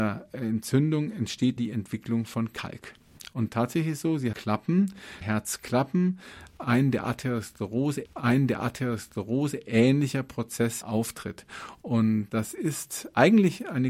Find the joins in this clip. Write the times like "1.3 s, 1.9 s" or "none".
1.6 s, 3.5 s, 4.3 s, 5.2 s, 8.0 s, 10.8 s

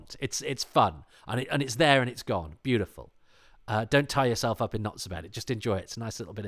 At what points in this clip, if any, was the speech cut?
none

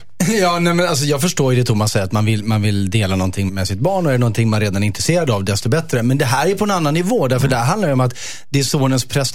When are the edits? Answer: 3.5 s

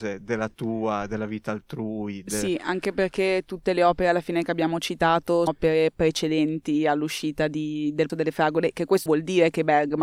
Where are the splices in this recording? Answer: 5.5 s, 8.1 s, 9.1 s

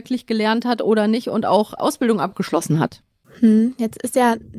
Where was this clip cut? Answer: 1.8 s

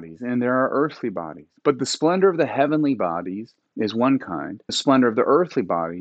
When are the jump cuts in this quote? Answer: 1.6 s, 4.7 s

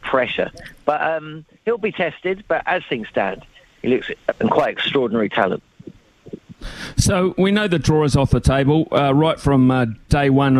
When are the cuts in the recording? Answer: 4.3 s

